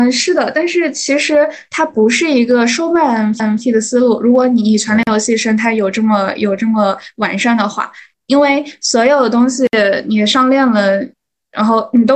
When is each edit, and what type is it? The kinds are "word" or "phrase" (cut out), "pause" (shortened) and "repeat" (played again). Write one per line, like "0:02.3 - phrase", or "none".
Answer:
0:03.4 - repeat